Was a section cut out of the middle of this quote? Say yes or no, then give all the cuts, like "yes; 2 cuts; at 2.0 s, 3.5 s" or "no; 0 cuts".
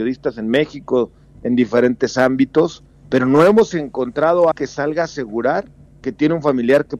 yes; 1 cut; at 4.5 s